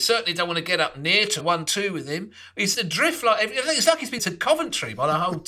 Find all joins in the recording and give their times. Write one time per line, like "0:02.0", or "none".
0:01.4
0:02.7
0:04.2